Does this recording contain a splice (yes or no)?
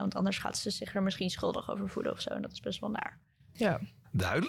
no